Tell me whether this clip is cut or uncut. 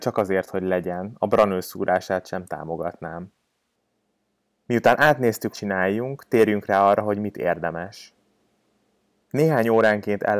cut